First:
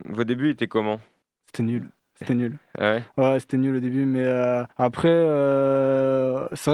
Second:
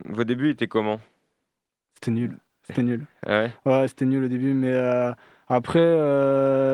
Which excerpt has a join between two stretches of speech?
first; 2 cuts; at 1.2 s, 4.7 s

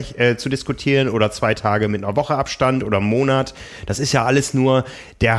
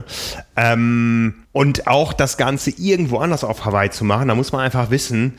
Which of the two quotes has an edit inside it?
second; 1 cut; at 1.4 s

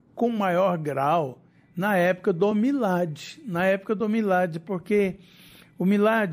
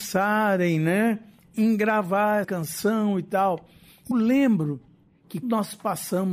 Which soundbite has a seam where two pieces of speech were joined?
second; 4 cuts; at 1.5 s, 2.4 s, 4.1 s, 5.4 s

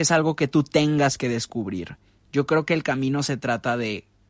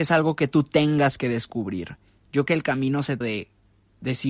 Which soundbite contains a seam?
second; 2 cuts; at 2.5 s, 3.2 s

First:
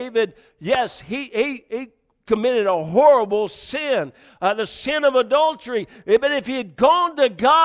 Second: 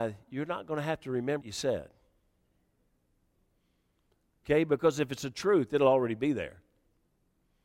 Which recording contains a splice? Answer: second; 1 cut; at 1.4 s

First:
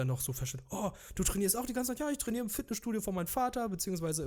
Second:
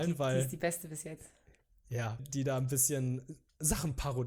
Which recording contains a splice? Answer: second; 1 cut; at 2.2 s

